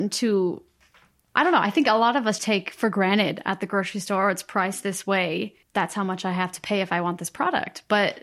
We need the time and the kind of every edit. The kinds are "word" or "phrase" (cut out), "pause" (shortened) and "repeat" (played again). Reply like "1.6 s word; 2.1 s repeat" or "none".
2.4 s word; 5.6 s pause